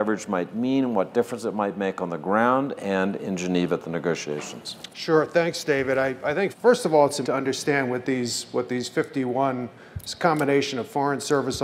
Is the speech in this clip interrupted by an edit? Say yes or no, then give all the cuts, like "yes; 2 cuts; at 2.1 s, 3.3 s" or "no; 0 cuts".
yes; 2 cuts; at 6.5 s, 7.2 s